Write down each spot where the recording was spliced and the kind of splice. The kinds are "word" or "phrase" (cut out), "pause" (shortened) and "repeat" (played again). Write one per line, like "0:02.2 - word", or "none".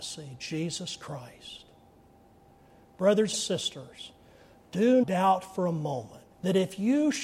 0:03.3 - word
0:05.0 - word
0:06.3 - pause